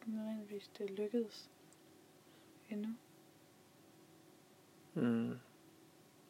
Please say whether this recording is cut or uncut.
uncut